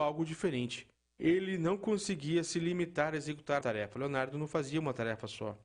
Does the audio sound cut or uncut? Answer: cut